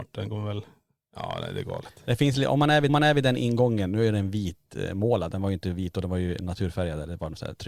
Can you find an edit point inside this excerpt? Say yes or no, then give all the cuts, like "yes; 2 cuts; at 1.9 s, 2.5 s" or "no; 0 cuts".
yes; 1 cut; at 2.9 s